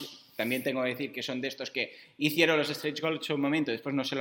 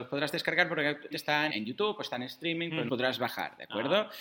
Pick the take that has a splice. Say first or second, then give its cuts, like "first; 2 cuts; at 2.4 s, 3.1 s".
second; 3 cuts; at 1.1 s, 1.5 s, 2.9 s